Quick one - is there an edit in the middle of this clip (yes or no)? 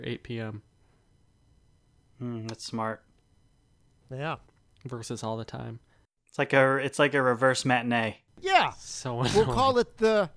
no